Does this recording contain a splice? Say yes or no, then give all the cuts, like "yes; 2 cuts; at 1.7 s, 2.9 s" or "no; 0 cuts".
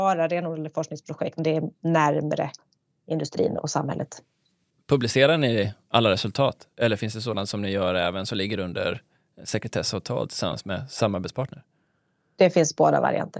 yes; 2 cuts; at 1.4 s, 3.6 s